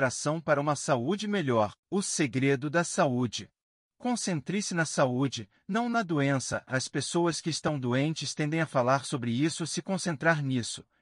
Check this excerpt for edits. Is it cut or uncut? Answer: cut